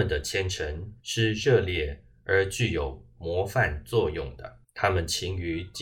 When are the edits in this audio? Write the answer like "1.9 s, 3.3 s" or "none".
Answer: 1.0 s, 4.6 s

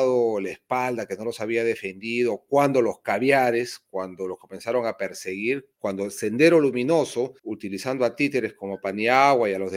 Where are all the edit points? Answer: 5.7 s, 7.4 s

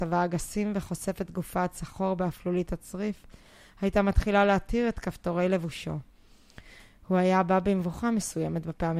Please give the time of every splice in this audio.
none

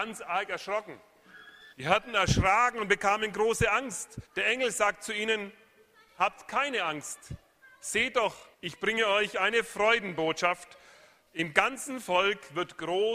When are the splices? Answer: 1.7 s, 4.3 s, 8.5 s

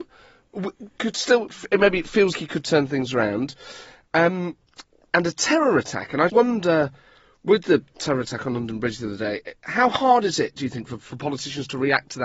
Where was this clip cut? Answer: 1.0 s, 2.3 s, 6.3 s

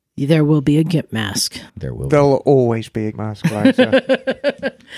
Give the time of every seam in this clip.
1.7 s, 3.1 s

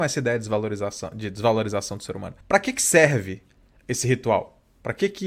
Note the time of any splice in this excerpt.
2.4 s

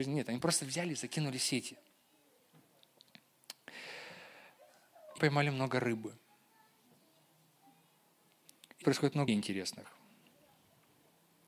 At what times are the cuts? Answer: 5.2 s, 8.8 s, 9.3 s

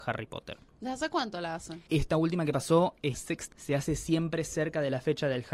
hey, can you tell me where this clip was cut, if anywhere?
1.9 s, 3.1 s, 3.5 s

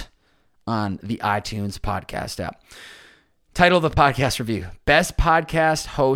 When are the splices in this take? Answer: none

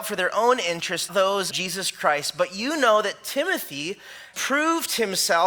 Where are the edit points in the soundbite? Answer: 1.1 s, 1.5 s, 4.3 s

